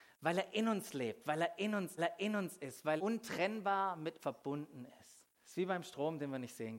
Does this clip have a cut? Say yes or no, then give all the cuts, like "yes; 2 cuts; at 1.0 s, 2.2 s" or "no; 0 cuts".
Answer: yes; 4 cuts; at 2.0 s, 3.0 s, 4.2 s, 5.3 s